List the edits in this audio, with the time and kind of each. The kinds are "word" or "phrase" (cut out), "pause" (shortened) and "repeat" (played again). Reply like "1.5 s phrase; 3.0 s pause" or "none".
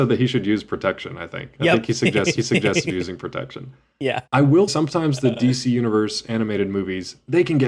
2.4 s repeat; 4.3 s pause; 4.7 s word